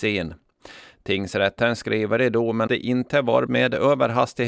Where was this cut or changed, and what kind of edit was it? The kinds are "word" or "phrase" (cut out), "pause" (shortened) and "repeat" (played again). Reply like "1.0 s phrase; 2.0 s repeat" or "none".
2.7 s word; 3.5 s word